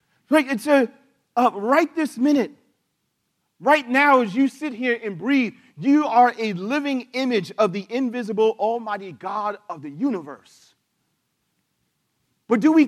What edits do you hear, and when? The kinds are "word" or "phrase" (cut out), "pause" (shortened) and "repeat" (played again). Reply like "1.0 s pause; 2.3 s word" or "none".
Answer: none